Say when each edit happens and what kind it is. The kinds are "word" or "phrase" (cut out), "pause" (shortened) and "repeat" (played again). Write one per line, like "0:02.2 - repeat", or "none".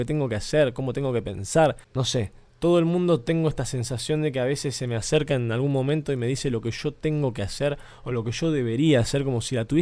none